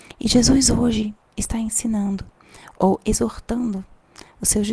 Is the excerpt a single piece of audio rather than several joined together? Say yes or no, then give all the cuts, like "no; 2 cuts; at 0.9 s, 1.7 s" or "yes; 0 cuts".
yes; 0 cuts